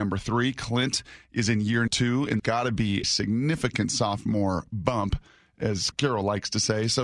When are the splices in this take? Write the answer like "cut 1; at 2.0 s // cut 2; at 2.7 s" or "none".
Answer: cut 1; at 1.9 s // cut 2; at 2.4 s // cut 3; at 3.0 s // cut 4; at 5.9 s